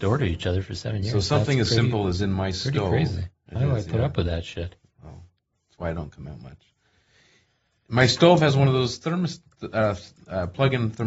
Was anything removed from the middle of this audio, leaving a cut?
no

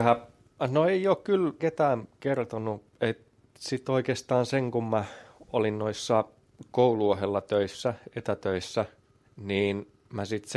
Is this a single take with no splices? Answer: no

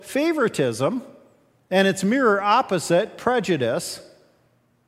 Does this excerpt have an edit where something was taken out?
no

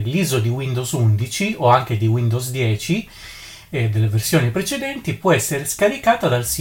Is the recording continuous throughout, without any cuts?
yes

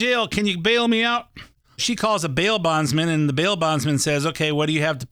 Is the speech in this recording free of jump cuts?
no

